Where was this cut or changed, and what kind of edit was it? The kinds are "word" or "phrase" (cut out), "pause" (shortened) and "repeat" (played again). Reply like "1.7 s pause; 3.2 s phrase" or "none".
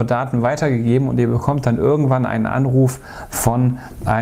none